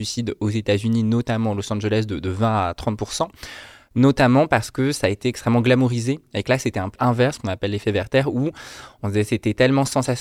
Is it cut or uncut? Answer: cut